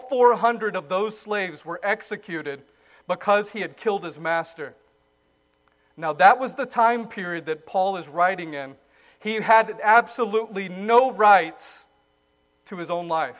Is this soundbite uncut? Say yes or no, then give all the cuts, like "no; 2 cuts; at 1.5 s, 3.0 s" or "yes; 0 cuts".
yes; 0 cuts